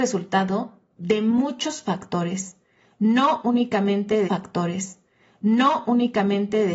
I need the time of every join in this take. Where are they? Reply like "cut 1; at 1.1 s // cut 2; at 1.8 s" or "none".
cut 1; at 4.3 s

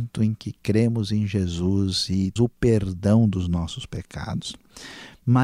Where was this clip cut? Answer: cut 1; at 2.4 s

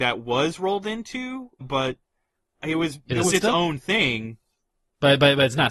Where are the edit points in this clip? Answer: cut 1; at 1.6 s // cut 2; at 3.3 s

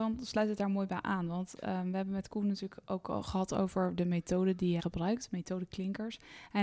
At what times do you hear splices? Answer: cut 1; at 4.8 s

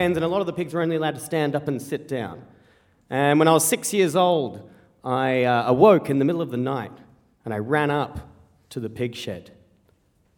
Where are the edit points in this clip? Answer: none

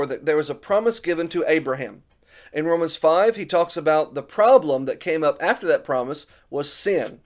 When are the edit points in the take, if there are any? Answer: none

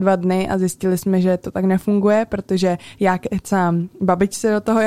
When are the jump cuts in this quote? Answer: none

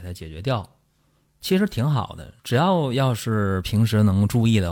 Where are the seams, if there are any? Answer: cut 1; at 2.4 s

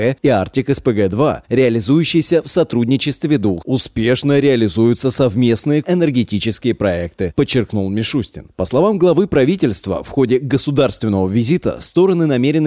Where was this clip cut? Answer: cut 1; at 3.6 s // cut 2; at 5.8 s

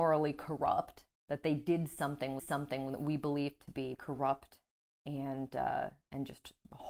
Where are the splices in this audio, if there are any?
cut 1; at 1.2 s // cut 2; at 2.4 s // cut 3; at 3.9 s // cut 4; at 4.8 s

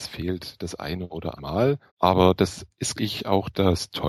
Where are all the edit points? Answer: cut 1; at 1.4 s // cut 2; at 1.9 s // cut 3; at 3.0 s

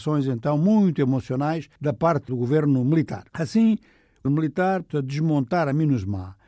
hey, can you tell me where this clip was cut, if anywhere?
cut 1; at 1.8 s // cut 2; at 2.3 s // cut 3; at 3.3 s // cut 4; at 4.3 s // cut 5; at 4.9 s

